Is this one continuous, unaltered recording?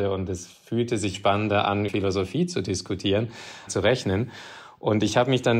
no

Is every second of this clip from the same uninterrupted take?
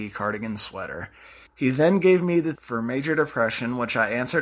no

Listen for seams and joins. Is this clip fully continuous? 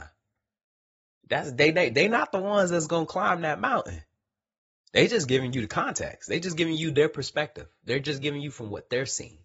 yes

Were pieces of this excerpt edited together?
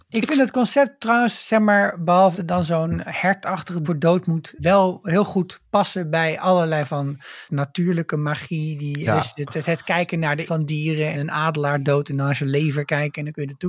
yes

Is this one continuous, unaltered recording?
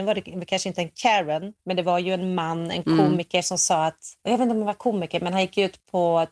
no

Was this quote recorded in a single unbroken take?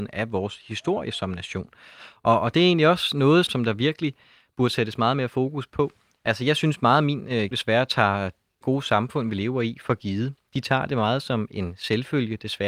no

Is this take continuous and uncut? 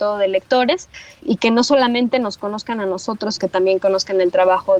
no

